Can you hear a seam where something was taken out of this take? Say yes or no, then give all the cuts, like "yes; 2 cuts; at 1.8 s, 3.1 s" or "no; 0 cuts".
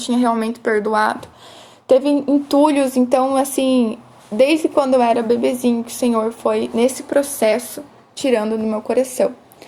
no; 0 cuts